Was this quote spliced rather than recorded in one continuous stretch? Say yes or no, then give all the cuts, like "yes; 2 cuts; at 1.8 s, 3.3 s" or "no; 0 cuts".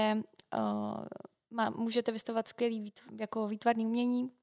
no; 0 cuts